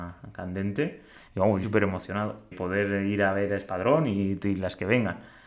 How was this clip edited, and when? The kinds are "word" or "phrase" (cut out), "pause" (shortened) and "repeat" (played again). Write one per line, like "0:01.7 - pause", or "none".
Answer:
0:01.6 - phrase
0:02.5 - word